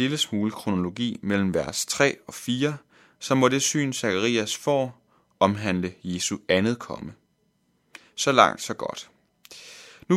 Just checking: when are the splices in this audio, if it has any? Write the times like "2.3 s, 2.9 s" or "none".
none